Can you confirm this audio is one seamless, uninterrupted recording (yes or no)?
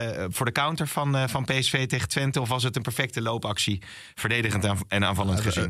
yes